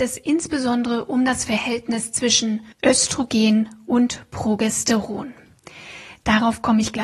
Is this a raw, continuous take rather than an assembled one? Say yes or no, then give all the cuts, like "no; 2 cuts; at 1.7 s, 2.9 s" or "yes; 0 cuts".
no; 1 cut; at 2.7 s